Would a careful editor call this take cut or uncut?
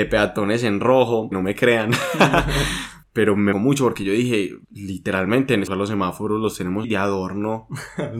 cut